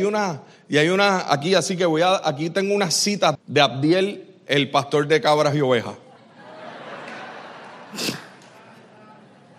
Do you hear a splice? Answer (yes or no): yes